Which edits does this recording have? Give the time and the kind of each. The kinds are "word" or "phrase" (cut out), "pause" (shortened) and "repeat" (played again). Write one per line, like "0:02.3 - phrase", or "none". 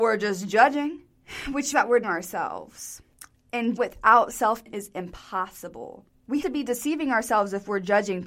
0:01.7 - word
0:02.0 - word
0:03.8 - word
0:04.7 - word
0:06.4 - word